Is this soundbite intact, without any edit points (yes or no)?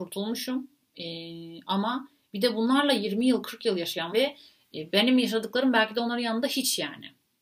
no